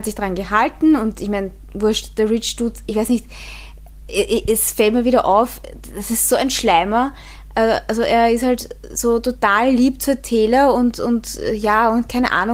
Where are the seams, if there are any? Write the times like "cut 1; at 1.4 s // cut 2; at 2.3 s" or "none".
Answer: none